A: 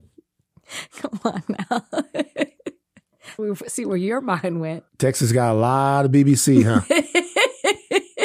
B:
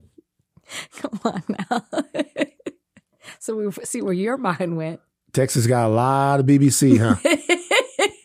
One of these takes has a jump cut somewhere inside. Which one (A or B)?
A